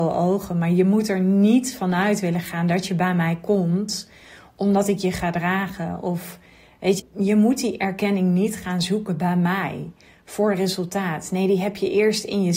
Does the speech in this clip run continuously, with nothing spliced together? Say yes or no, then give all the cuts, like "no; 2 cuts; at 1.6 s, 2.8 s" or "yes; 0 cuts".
no; 1 cut; at 7.0 s